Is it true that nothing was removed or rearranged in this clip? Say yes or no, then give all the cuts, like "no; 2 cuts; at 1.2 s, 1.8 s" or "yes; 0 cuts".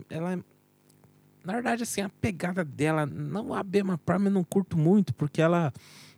yes; 0 cuts